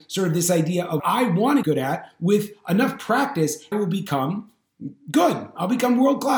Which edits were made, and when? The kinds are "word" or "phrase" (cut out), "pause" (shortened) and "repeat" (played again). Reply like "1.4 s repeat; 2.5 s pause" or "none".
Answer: 1.0 s word; 1.6 s word; 3.7 s phrase